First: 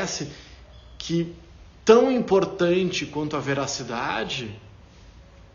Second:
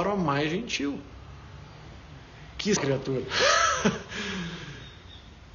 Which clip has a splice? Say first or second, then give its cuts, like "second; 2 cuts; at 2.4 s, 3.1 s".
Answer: second; 1 cut; at 2.8 s